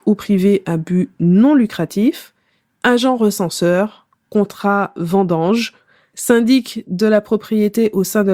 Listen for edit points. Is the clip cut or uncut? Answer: uncut